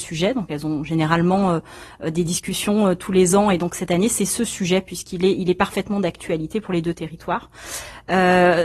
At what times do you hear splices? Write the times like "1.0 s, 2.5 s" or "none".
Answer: none